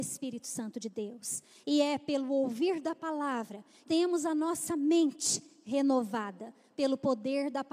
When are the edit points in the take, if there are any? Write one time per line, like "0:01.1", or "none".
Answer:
0:03.9